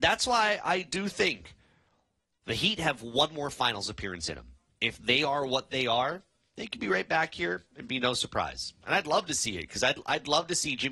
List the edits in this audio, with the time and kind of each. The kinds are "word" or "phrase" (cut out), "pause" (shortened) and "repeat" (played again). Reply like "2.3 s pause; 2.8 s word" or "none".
none